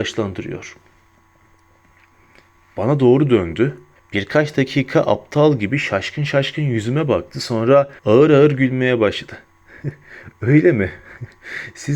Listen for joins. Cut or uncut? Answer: cut